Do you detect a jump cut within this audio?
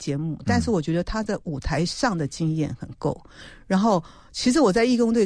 no; 0 cuts

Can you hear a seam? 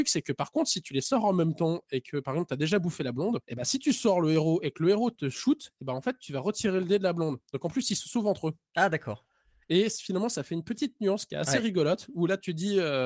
yes; 1 cut; at 3.4 s

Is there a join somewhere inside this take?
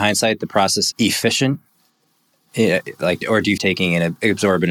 yes; 3 cuts; at 0.9 s, 3.2 s, 3.6 s

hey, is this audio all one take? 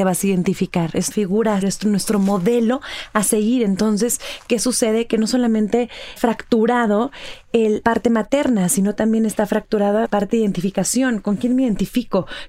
no; 5 cuts; at 1.1 s, 1.6 s, 6.2 s, 7.8 s, 10.0 s

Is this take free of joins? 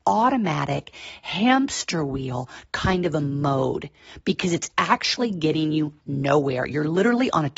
yes; 0 cuts

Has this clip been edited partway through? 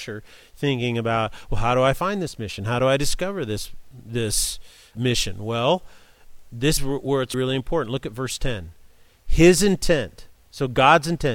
yes; 3 cuts; at 4.9 s, 6.8 s, 7.3 s

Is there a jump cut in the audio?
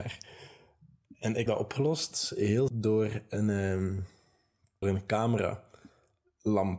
yes; 3 cuts; at 1.5 s, 2.7 s, 4.8 s

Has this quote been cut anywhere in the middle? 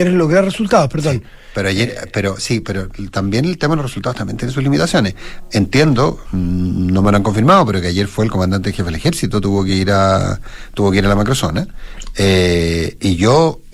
no; 0 cuts

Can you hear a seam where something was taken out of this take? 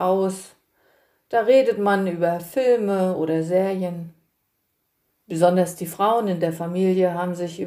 no; 0 cuts

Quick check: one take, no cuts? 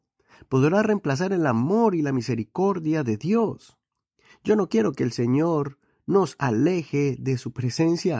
yes; 0 cuts

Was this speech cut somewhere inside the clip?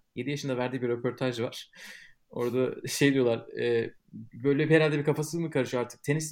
no; 0 cuts

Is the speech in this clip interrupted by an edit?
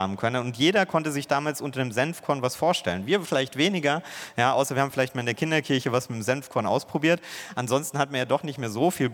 no; 0 cuts

